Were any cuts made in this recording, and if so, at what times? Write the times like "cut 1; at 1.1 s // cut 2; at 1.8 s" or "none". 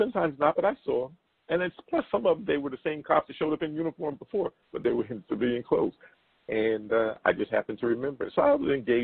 none